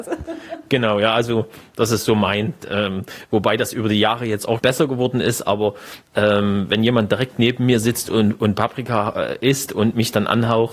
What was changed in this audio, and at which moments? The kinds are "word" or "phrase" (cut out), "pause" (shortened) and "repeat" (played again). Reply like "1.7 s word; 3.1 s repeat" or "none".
4.6 s word